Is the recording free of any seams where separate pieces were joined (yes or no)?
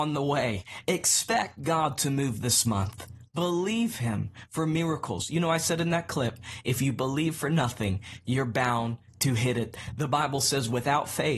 yes